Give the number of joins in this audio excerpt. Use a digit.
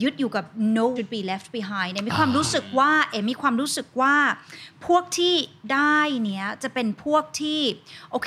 1